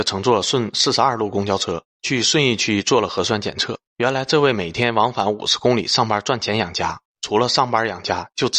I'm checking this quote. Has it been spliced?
yes; 2 cuts; at 1.8 s, 3.9 s

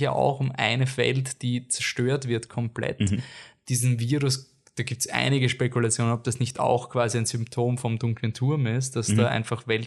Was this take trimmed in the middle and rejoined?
no; 0 cuts

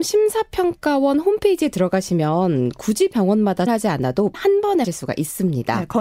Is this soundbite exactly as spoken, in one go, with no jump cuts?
no; 3 cuts; at 3.7 s, 4.3 s, 4.8 s

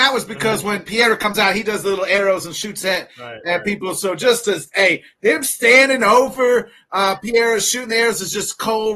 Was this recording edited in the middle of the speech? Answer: no; 0 cuts

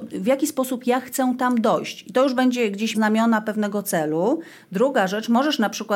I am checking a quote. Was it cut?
yes; 1 cut; at 2.9 s

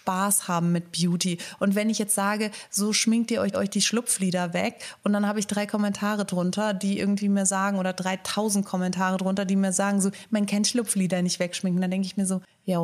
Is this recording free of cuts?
no; 1 cut; at 3.5 s

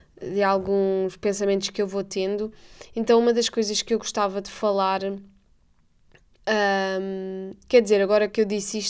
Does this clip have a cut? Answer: no; 0 cuts

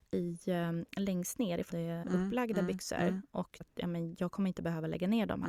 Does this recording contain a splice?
yes; 3 cuts; at 1.7 s, 2.0 s, 3.6 s

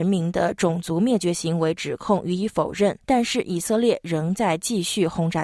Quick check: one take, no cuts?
no; 1 cut; at 3.0 s

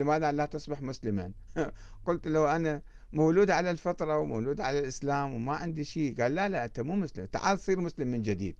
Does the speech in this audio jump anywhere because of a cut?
no; 0 cuts

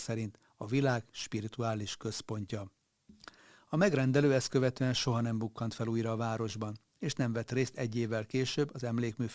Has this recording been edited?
no; 0 cuts

